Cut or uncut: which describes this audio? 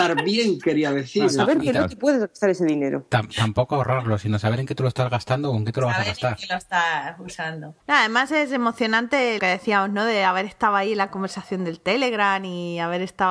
cut